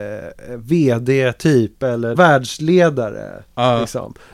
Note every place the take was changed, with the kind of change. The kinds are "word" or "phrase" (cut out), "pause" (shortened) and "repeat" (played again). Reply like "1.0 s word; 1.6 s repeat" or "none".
2.1 s word

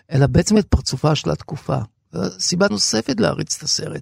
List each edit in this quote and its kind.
2.7 s word

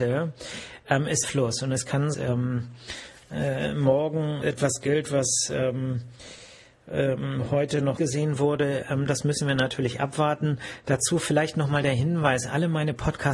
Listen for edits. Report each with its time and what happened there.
1.2 s phrase; 2.1 s phrase; 4.4 s word; 8.0 s word

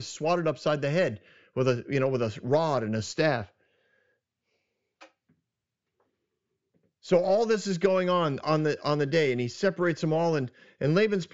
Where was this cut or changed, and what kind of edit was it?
none

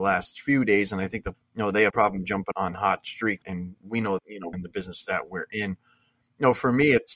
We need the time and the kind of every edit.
1.3 s word; 1.9 s word; 2.5 s word; 3.4 s word; 4.2 s word; 4.5 s word

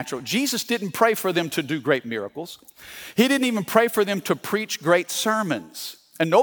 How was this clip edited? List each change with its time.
none

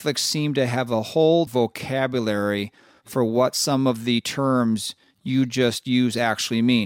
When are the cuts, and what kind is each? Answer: 1.5 s word

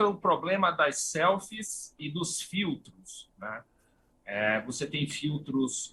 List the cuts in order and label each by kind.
none

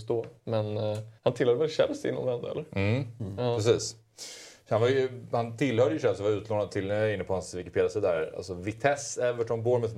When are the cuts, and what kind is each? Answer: 1.2 s pause

